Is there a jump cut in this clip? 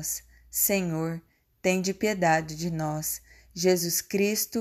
no; 0 cuts

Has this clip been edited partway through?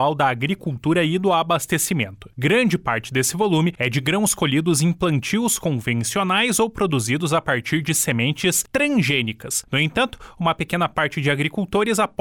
no; 0 cuts

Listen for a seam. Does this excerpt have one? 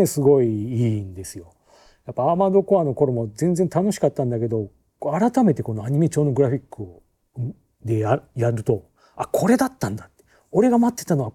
no; 0 cuts

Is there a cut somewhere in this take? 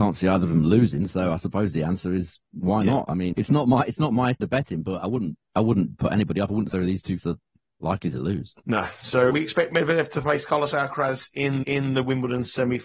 yes; 8 cuts; at 2.5 s, 3.4 s, 4.4 s, 6.7 s, 7.2 s, 8.6 s, 9.3 s, 11.6 s

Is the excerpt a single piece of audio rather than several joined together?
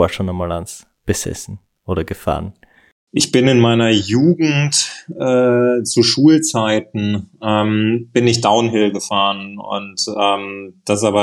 yes; 0 cuts

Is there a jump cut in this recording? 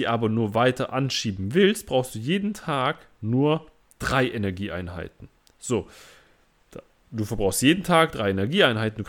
no; 0 cuts

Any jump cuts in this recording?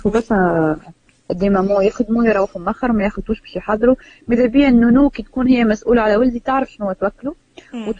no; 0 cuts

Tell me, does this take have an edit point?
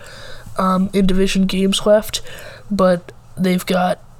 no; 0 cuts

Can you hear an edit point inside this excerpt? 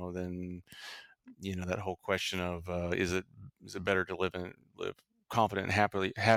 no; 0 cuts

